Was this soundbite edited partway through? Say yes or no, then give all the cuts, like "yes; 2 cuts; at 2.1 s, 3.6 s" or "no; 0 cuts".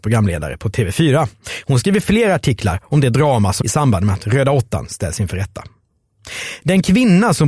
yes; 1 cut; at 3.6 s